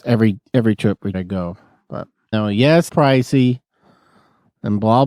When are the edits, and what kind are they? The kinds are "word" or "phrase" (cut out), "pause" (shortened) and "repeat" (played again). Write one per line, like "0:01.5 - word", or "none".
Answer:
0:01.1 - word
0:02.3 - word
0:02.9 - word